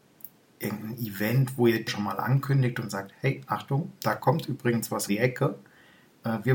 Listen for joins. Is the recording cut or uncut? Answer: cut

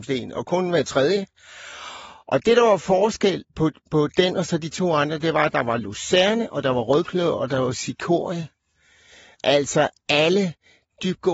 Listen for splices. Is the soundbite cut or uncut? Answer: uncut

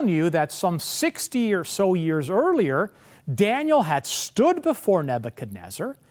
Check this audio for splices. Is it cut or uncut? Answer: uncut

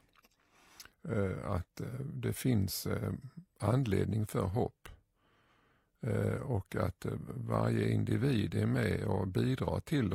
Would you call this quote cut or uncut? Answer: uncut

